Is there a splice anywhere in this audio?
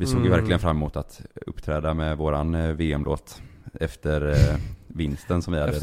no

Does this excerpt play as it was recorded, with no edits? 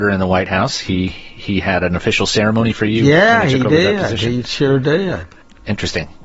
yes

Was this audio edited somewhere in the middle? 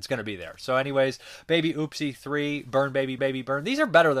yes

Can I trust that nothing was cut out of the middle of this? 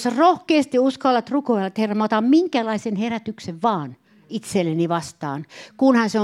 yes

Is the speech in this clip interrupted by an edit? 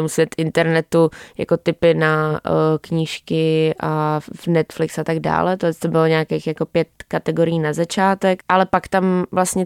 no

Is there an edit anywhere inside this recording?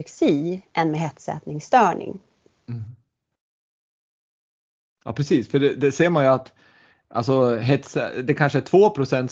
no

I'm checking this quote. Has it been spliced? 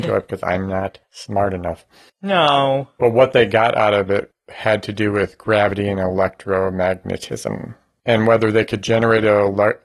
no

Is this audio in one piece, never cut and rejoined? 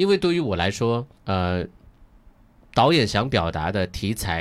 no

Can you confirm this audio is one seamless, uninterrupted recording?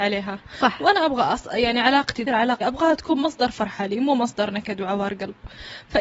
no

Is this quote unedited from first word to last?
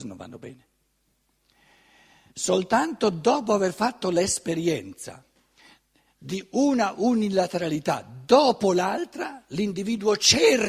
yes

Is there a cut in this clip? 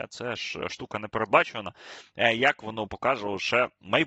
yes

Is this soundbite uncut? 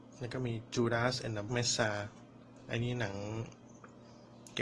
no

